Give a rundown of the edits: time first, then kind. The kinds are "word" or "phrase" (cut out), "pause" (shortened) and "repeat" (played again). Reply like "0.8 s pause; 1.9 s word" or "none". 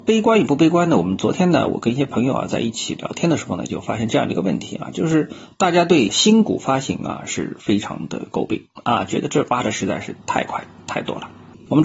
10.2 s pause